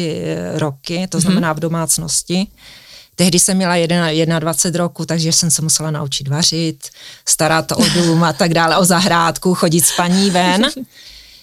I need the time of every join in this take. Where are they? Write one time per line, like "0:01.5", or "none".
none

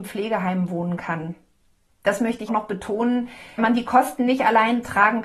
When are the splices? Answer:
0:01.9
0:02.5
0:03.6

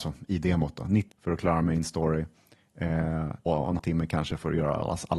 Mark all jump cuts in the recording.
0:01.1
0:03.5
0:03.8

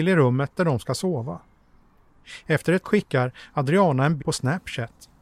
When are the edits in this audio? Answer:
0:02.8
0:04.2

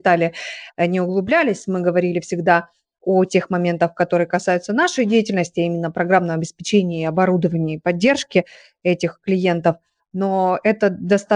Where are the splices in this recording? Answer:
none

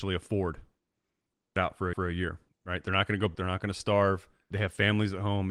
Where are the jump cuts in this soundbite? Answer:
0:01.6
0:01.9
0:02.5
0:03.3
0:04.5

